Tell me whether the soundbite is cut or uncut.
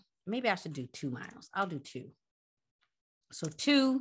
uncut